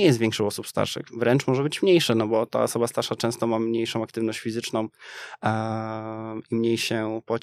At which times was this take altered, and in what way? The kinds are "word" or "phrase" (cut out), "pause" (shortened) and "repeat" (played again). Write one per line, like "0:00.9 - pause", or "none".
none